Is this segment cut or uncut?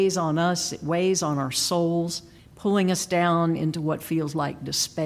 cut